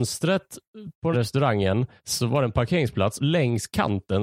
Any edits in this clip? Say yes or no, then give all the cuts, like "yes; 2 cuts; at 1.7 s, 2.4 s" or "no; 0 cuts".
yes; 3 cuts; at 1.1 s, 2.0 s, 3.2 s